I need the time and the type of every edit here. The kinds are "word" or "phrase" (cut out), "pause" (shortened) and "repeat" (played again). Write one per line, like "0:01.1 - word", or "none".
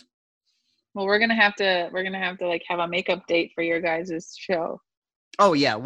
none